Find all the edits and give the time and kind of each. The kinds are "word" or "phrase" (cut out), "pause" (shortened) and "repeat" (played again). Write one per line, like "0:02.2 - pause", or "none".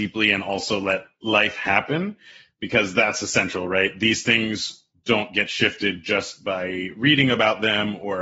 none